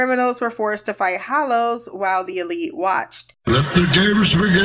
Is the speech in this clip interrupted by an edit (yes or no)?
no